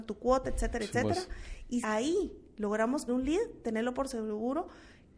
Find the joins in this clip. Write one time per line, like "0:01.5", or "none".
0:01.8
0:03.1